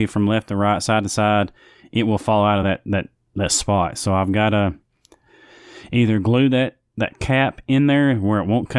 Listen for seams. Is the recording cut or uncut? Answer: uncut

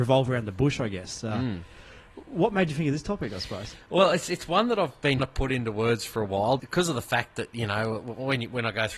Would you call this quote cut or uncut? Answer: cut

